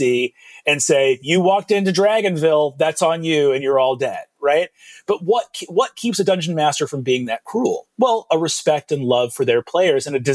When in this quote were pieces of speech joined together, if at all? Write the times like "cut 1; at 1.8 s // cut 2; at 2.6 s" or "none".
none